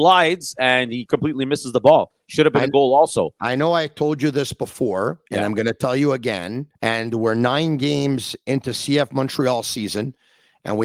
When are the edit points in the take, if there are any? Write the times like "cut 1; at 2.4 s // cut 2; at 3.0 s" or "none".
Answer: cut 1; at 5.3 s // cut 2; at 6.7 s